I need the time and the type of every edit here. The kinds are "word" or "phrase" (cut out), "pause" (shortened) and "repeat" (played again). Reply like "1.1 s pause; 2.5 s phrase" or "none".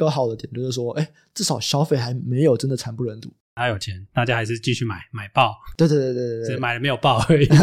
none